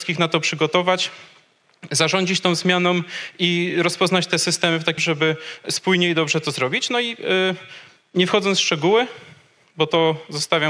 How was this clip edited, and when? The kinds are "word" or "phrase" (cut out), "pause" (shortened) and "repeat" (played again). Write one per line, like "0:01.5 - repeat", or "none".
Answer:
0:05.0 - word